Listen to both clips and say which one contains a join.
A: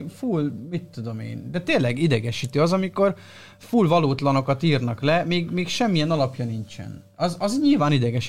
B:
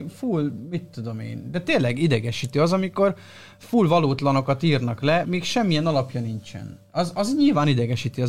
B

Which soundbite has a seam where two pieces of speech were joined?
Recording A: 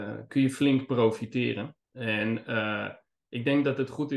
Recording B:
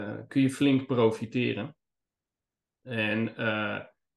A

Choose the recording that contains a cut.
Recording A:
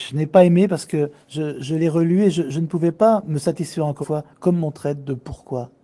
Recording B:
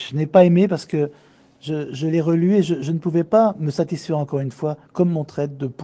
A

